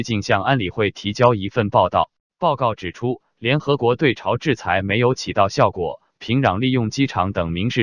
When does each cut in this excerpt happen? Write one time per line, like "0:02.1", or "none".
0:02.3